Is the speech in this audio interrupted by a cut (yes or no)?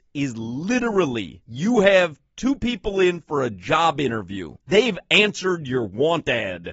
no